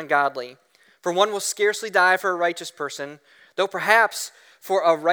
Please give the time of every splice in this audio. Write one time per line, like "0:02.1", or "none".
none